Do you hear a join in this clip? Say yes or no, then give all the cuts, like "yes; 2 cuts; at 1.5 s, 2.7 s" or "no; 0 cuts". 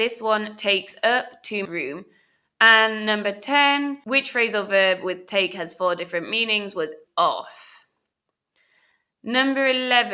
yes; 3 cuts; at 1.7 s, 4.0 s, 7.1 s